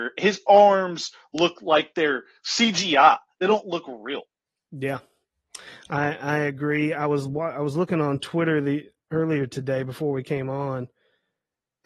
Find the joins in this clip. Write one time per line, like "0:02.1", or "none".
none